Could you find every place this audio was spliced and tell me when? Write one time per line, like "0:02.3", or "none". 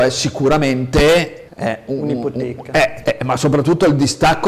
0:01.5
0:03.0

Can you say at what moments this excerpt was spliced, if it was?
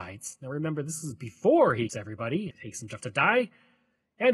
0:01.9
0:02.5
0:03.0

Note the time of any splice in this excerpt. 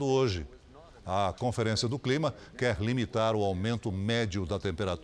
none

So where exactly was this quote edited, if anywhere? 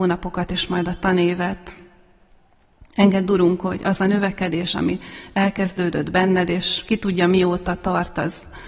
none

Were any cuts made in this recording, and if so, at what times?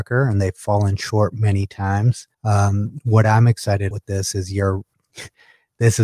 0:02.3
0:03.9

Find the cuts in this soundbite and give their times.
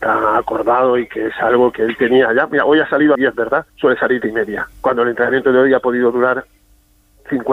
0:03.1
0:03.7
0:04.2
0:04.7

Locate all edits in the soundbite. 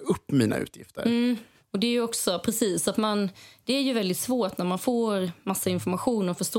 none

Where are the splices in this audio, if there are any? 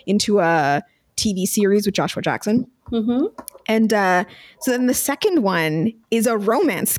none

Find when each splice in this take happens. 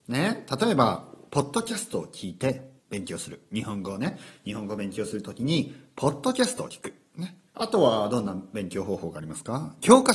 0:02.8
0:07.5

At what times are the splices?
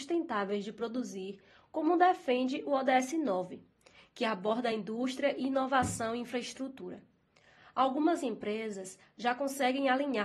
none

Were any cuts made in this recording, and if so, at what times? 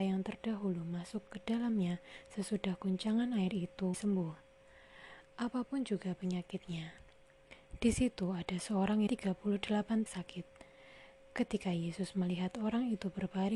0:03.9
0:09.1
0:10.1

